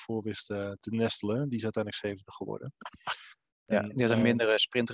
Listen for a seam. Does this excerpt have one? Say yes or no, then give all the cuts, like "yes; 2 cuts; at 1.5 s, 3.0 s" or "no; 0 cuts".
no; 0 cuts